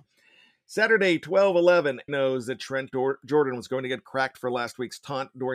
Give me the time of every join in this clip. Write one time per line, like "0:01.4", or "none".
0:02.1

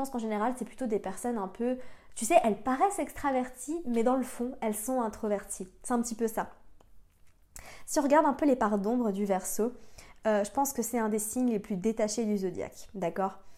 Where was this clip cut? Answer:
none

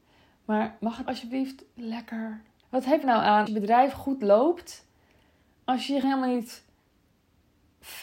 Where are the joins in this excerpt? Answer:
0:01.1
0:02.6
0:03.0
0:03.5
0:06.0

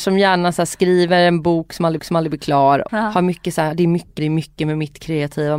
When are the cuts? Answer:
0:02.0
0:02.9
0:04.2

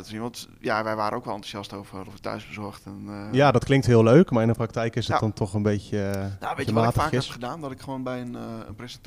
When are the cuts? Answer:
0:02.1

